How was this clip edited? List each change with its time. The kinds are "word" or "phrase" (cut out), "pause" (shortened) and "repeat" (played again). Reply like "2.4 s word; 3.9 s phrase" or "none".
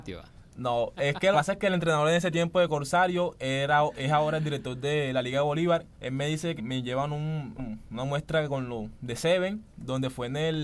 1.3 s phrase; 5.9 s pause; 6.6 s word; 7.6 s word; 9.7 s pause